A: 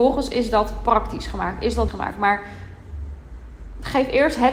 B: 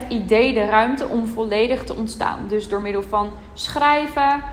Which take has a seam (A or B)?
A